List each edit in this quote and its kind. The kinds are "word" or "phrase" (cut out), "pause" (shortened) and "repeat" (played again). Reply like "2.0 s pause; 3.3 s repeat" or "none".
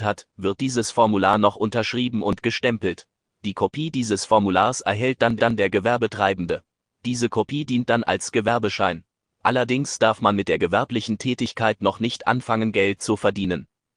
5.4 s repeat